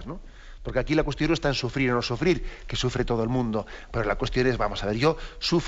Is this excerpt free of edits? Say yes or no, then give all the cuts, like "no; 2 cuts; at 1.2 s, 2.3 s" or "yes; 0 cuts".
yes; 0 cuts